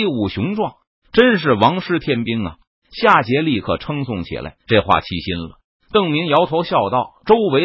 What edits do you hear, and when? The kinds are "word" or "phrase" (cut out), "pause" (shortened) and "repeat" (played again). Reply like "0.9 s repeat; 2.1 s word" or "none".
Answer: 4.6 s pause